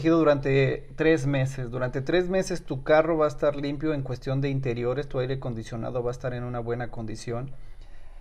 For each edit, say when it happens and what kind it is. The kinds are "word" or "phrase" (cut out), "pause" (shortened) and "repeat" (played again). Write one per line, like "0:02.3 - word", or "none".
none